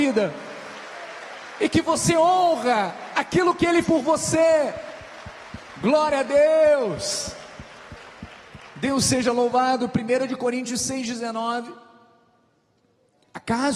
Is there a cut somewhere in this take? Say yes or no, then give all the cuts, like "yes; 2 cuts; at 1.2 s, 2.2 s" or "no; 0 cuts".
yes; 1 cut; at 3.8 s